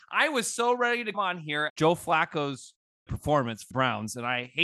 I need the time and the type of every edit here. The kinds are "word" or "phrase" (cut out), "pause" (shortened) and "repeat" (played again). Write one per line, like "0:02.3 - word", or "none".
0:01.1 - word
0:01.7 - word
0:03.1 - phrase
0:03.7 - word